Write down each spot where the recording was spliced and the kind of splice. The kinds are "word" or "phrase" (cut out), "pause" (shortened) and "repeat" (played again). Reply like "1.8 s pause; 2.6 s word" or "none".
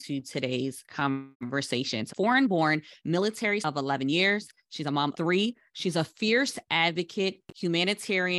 1.3 s pause; 2.1 s phrase; 3.6 s word; 5.1 s word